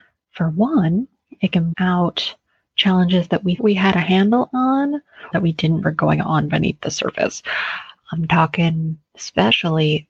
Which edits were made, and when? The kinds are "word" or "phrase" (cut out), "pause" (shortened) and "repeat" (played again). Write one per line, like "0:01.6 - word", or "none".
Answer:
0:01.7 - word
0:03.6 - word
0:05.3 - word
0:05.8 - word